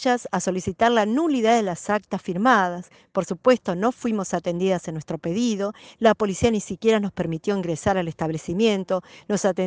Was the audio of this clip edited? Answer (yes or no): no